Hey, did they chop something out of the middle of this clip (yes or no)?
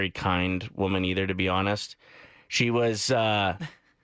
no